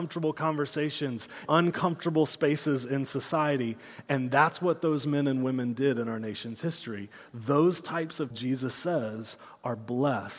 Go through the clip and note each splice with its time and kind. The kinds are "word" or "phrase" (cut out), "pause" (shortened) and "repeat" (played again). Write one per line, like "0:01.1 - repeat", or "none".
0:01.5 - word
0:08.3 - word